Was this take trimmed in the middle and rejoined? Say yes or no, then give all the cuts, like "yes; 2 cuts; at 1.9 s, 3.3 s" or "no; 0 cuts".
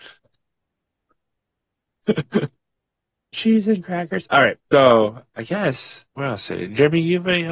yes; 3 cuts; at 3.3 s, 4.7 s, 6.1 s